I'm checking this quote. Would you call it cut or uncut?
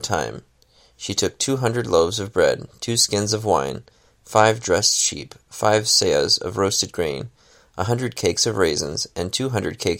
uncut